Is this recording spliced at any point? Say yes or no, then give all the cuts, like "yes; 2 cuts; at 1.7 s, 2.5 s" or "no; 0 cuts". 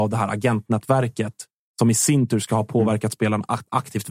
no; 0 cuts